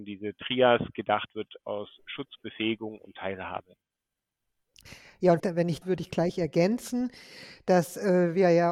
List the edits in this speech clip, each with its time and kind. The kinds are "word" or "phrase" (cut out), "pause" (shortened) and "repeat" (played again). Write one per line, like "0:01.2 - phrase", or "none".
0:05.4 - word
0:05.8 - word